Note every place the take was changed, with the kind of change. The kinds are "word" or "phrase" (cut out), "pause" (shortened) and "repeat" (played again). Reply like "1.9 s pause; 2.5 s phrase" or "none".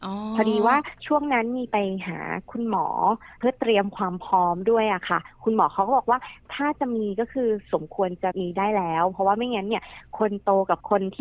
3.3 s pause

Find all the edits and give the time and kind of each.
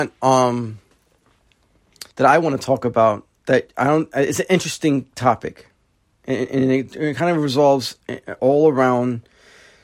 2.1 s pause; 3.3 s pause; 8.4 s word

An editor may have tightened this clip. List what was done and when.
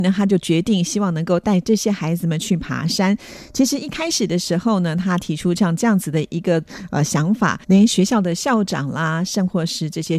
7.6 s pause

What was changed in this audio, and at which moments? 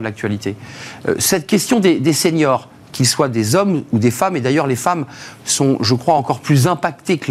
none

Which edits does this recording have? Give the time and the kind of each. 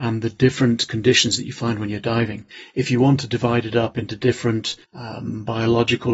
4.8 s pause

